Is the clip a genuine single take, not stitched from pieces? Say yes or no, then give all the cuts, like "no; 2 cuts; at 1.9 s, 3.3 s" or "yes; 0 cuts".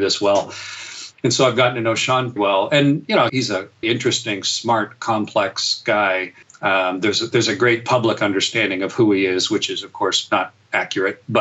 no; 4 cuts; at 2.4 s, 3.3 s, 3.8 s, 6.4 s